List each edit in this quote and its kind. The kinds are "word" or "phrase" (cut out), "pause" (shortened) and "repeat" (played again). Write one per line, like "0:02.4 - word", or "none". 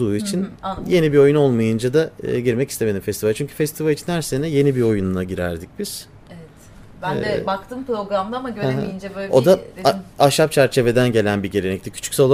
none